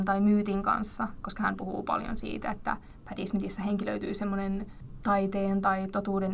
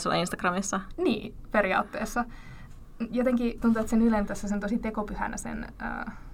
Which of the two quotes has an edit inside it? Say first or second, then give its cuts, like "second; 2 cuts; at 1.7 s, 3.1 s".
second; 2 cuts; at 3.6 s, 4.3 s